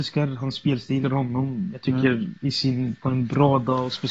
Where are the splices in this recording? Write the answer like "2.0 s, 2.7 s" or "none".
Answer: 1.0 s, 2.4 s, 3.0 s

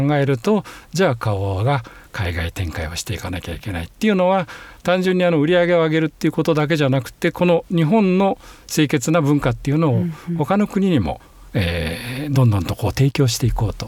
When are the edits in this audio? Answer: none

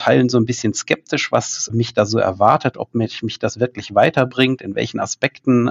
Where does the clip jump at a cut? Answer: none

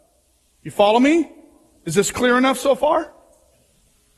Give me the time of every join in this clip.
none

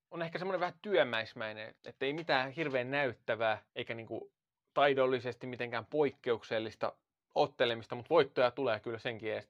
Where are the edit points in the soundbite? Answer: 1.8 s, 3.7 s

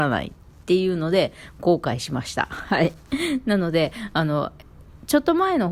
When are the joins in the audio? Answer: 3.0 s

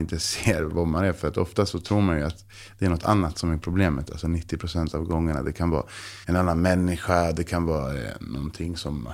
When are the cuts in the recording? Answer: 6.2 s

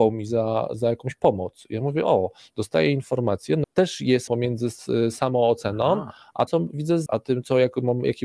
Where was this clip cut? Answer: 3.6 s, 4.3 s, 6.5 s, 7.1 s

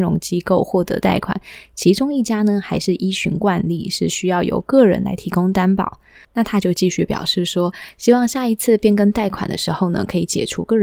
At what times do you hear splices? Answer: none

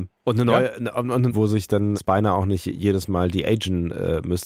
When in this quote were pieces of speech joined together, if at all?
1.3 s, 1.9 s

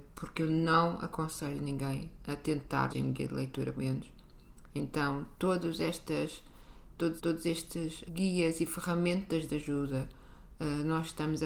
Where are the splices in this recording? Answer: 2.9 s, 3.7 s, 7.2 s, 8.1 s

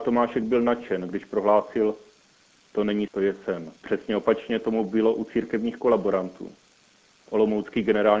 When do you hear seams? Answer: 3.1 s, 3.8 s

